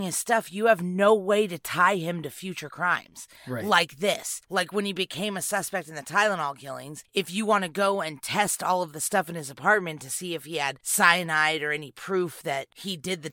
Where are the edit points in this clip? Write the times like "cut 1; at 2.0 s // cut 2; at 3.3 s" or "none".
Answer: cut 1; at 4.4 s